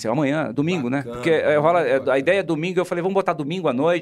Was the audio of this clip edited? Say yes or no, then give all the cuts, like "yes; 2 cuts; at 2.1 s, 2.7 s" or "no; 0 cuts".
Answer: no; 0 cuts